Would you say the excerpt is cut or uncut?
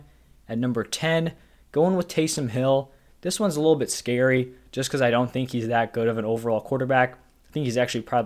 uncut